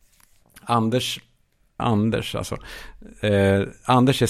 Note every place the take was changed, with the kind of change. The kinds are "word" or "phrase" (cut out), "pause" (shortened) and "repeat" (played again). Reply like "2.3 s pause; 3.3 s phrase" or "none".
1.8 s word